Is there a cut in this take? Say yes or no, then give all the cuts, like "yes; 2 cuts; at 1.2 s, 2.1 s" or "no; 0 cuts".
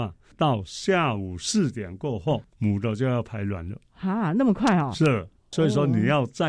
yes; 1 cut; at 3.9 s